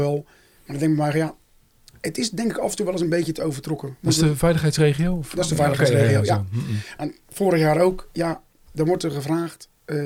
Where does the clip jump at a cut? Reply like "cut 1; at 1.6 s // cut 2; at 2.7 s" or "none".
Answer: none